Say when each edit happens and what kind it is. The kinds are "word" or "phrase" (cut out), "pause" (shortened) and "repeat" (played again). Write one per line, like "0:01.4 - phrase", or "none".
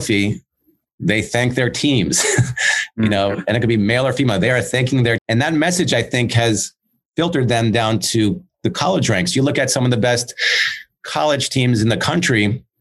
0:05.2 - word